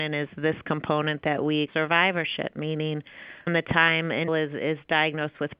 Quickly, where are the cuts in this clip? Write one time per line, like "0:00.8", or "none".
0:01.7
0:03.5
0:04.3